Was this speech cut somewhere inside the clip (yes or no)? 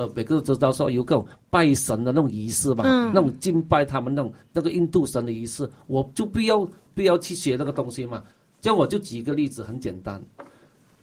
no